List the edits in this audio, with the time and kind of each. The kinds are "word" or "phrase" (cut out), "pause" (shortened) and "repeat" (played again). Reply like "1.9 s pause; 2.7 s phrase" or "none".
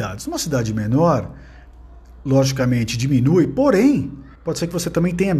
4.4 s pause